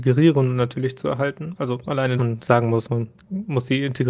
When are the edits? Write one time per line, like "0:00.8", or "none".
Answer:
0:02.2